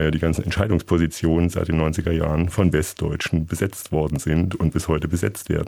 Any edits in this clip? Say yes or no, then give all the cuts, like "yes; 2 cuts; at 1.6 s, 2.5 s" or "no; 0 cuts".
no; 0 cuts